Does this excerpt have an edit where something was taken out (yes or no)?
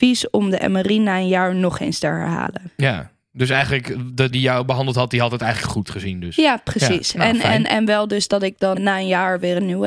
yes